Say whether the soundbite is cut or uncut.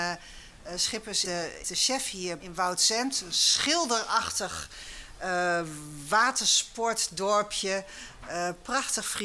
cut